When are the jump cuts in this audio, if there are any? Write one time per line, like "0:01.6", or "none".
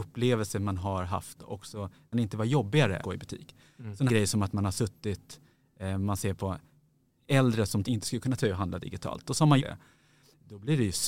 0:01.4
0:02.1
0:03.0
0:04.1
0:07.0
0:07.8
0:08.4
0:09.6